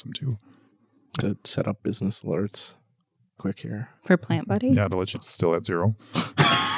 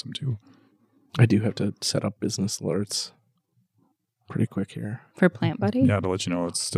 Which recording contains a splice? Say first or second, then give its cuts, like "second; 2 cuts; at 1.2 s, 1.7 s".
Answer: first; 3 cuts; at 1.2 s, 3.4 s, 5.1 s